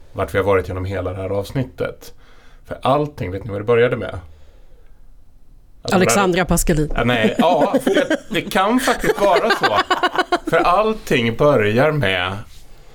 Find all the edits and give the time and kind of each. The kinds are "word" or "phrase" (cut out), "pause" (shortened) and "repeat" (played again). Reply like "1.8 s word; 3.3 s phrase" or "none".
none